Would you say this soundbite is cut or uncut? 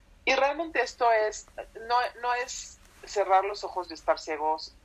uncut